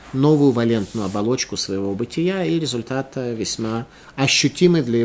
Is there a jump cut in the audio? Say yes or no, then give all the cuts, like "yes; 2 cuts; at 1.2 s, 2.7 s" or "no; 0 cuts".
no; 0 cuts